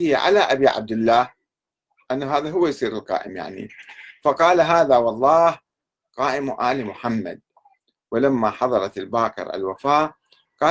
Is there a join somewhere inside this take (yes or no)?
no